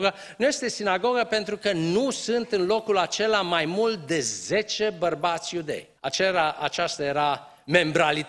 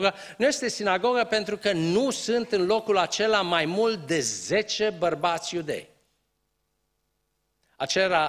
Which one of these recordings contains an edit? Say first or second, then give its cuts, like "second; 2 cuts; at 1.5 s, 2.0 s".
first; 1 cut; at 6.0 s